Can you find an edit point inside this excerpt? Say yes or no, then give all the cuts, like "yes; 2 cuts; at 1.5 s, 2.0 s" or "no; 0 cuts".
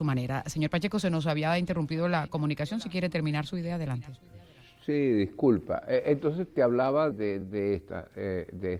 yes; 3 cuts; at 6.5 s, 7.1 s, 7.4 s